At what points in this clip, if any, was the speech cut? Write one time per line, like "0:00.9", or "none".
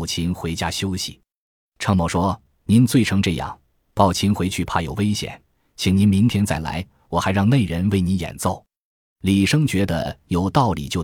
none